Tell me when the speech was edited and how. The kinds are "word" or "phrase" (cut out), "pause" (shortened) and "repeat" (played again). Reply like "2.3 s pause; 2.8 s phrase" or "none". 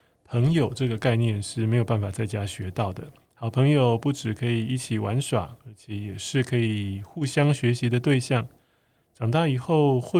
none